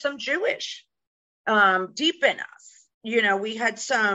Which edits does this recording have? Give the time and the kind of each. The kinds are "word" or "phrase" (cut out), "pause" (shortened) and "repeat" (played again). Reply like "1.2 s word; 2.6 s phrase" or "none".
2.9 s pause